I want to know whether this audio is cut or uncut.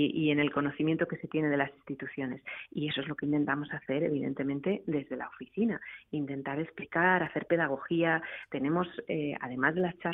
uncut